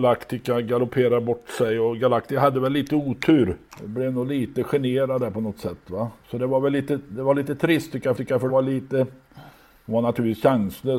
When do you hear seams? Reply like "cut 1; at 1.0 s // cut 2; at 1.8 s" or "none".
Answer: cut 1; at 6.2 s // cut 2; at 8.2 s // cut 3; at 8.5 s